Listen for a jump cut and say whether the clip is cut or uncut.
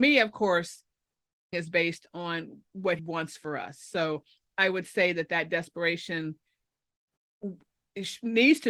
cut